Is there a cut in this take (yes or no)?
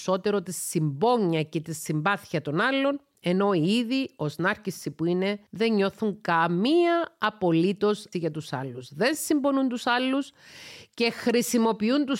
yes